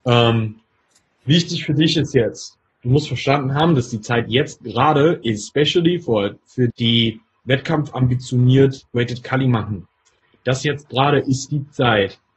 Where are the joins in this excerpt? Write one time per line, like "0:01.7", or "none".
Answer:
0:06.7